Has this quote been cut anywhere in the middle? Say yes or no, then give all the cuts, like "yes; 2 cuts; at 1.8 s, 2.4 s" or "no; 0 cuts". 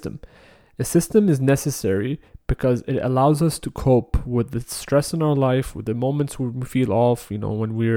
no; 0 cuts